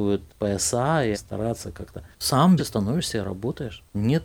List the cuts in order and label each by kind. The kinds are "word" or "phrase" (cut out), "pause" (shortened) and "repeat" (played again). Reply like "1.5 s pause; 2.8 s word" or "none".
1.1 s word; 2.6 s word